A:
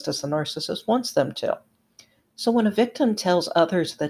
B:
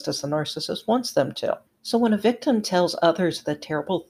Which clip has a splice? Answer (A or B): B